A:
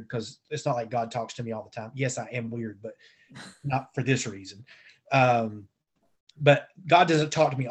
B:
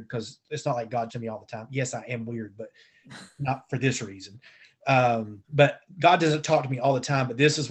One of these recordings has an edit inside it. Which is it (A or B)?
B